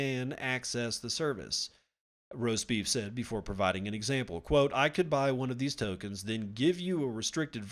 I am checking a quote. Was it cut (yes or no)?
no